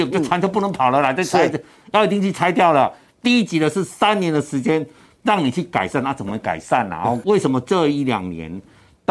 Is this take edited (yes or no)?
no